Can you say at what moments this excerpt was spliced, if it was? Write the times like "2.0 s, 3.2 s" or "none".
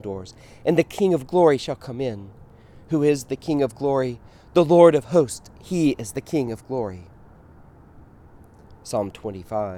none